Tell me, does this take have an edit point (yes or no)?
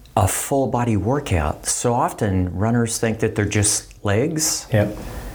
no